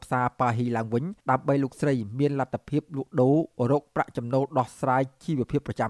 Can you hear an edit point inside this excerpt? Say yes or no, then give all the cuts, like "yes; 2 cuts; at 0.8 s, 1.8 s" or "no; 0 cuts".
yes; 1 cut; at 1.2 s